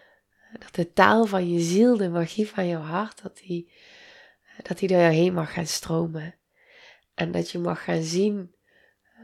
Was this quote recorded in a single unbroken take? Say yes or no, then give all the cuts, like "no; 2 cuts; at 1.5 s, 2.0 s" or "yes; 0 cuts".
yes; 0 cuts